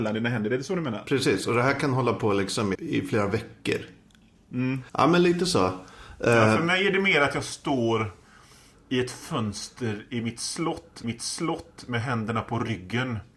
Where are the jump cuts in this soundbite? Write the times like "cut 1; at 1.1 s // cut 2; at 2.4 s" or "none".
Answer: cut 1; at 2.7 s // cut 2; at 4.9 s // cut 3; at 11.0 s